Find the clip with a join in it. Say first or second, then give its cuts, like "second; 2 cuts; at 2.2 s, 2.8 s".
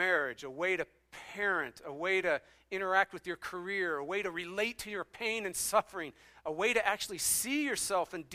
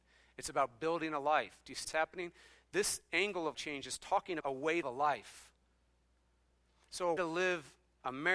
second; 5 cuts; at 1.8 s, 3.5 s, 4.4 s, 4.8 s, 7.2 s